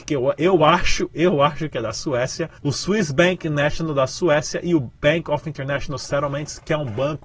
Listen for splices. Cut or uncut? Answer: cut